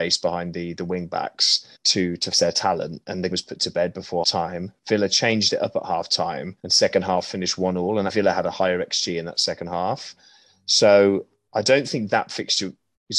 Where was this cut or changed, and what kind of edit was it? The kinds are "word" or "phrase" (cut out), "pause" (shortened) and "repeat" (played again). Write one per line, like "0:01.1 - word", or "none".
0:01.7 - pause
0:02.3 - word
0:03.3 - word
0:04.2 - word
0:06.6 - pause
0:08.1 - word